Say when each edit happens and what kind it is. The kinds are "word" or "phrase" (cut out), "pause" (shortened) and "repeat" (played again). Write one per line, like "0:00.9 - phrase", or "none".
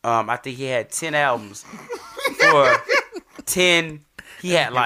none